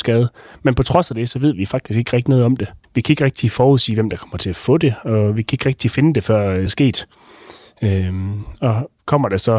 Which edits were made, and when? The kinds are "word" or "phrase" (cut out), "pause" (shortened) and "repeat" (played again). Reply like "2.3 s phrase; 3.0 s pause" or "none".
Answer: 2.8 s pause; 6.7 s word